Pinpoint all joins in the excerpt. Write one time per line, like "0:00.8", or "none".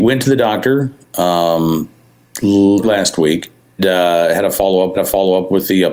0:02.8
0:03.8
0:04.9